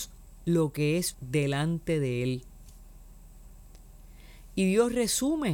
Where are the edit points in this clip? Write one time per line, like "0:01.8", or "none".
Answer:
0:01.1